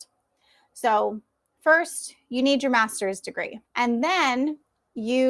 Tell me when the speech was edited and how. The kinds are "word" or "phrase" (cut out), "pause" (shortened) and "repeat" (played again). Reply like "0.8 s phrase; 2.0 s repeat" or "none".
3.6 s pause